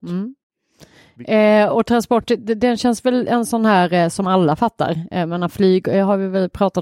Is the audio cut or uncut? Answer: uncut